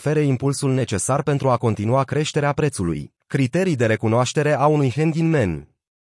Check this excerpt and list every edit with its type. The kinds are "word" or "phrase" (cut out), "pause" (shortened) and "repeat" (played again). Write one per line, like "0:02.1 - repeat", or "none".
0:03.2 - pause